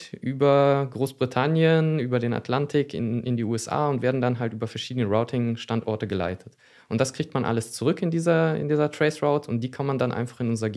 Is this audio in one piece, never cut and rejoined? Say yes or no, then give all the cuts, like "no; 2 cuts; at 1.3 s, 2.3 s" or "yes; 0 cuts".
yes; 0 cuts